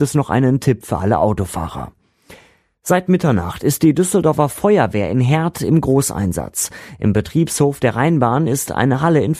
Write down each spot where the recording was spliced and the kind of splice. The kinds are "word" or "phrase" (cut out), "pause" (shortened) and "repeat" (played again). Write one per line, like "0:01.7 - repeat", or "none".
none